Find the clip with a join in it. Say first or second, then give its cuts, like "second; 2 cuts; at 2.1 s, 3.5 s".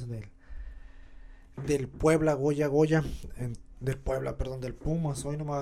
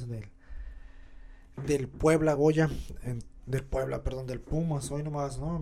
second; 1 cut; at 2.4 s